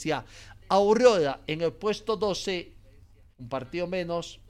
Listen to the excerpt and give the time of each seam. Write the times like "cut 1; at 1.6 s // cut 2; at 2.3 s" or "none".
cut 1; at 3.3 s